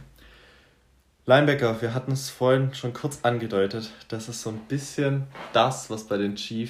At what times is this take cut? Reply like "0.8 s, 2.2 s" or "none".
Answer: none